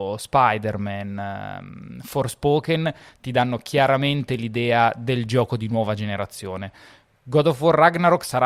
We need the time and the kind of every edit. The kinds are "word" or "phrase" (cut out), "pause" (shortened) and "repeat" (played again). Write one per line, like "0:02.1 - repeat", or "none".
none